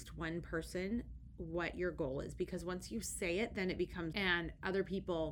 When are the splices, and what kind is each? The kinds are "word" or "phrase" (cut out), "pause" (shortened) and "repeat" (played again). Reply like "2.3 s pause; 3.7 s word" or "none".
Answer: 4.1 s phrase